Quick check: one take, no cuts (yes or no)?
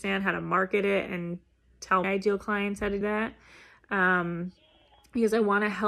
no